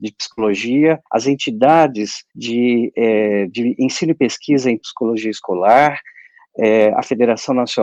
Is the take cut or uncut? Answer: cut